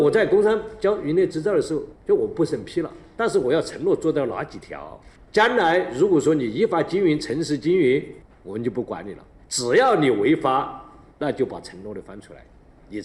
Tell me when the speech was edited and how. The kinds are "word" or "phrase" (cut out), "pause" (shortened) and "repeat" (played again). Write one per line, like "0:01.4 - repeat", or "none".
none